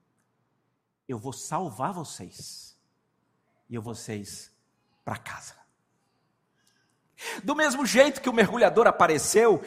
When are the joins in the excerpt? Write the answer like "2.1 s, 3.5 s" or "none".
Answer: 3.9 s